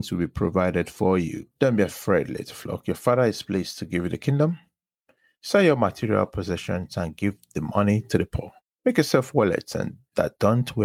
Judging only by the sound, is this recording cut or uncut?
uncut